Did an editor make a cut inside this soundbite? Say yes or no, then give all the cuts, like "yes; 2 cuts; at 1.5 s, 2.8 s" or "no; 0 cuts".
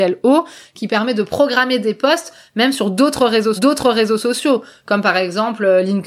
yes; 1 cut; at 3.6 s